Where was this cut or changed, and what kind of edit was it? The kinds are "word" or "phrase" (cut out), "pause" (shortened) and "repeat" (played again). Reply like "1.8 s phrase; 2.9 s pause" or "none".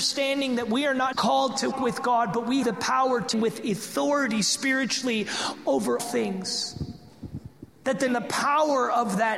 1.1 s word; 1.7 s word; 2.6 s word; 3.3 s word; 6.0 s word; 8.1 s word